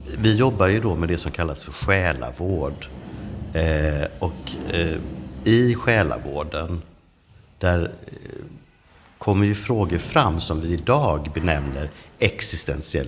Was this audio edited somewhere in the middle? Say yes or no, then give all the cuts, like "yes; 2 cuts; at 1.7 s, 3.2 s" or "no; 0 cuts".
no; 0 cuts